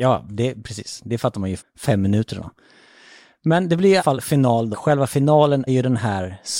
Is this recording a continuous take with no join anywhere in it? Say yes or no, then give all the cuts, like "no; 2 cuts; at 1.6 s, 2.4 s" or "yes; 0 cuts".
no; 4 cuts; at 1.6 s, 4.0 s, 4.7 s, 5.7 s